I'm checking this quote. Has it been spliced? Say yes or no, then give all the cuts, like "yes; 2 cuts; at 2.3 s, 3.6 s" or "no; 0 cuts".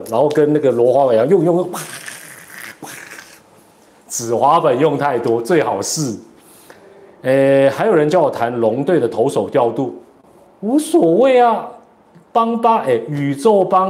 no; 0 cuts